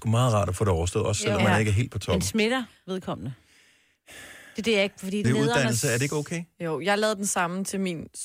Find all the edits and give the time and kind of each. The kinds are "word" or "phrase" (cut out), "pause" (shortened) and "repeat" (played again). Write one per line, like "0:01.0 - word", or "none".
0:05.2 - phrase